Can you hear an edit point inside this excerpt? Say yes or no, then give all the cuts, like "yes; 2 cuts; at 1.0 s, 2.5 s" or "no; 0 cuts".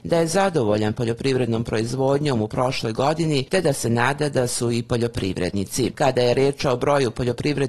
no; 0 cuts